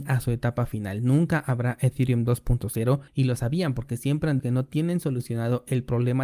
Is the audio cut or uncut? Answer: cut